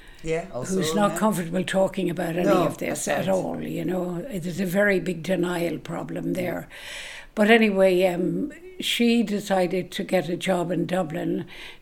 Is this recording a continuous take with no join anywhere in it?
yes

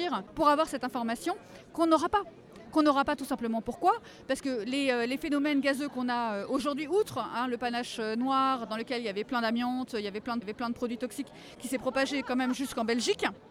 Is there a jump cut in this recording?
yes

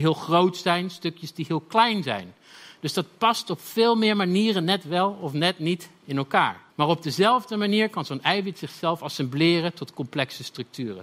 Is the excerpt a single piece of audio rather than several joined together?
no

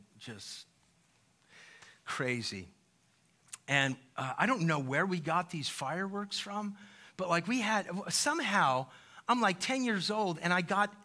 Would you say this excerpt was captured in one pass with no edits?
yes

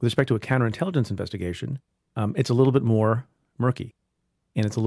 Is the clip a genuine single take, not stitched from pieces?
yes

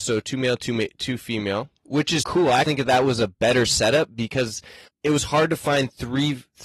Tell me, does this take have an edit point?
yes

